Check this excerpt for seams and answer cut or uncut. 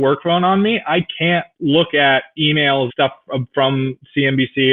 cut